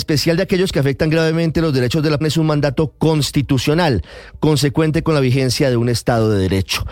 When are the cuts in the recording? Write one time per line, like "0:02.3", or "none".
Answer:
0:02.2